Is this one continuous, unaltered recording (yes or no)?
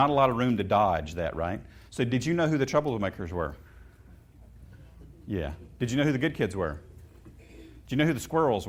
no